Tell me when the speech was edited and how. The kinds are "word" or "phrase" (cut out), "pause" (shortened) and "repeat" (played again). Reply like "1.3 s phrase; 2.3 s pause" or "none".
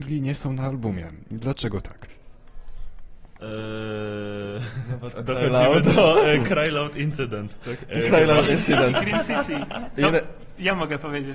5.1 s word